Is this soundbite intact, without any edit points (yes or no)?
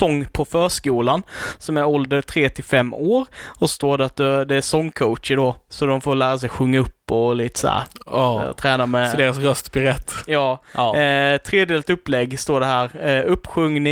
yes